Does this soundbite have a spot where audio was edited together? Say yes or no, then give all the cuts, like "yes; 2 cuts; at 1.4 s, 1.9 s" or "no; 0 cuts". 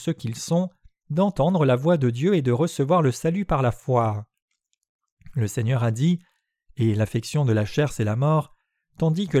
no; 0 cuts